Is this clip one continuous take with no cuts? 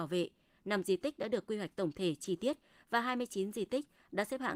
yes; 0 cuts

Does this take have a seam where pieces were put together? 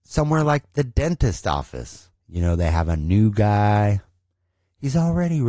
yes; 1 cut; at 2.2 s

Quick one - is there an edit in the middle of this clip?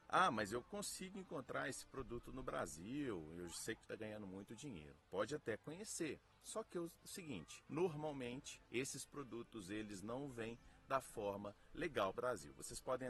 yes; 3 cuts; at 3.8 s, 8.7 s, 12.1 s

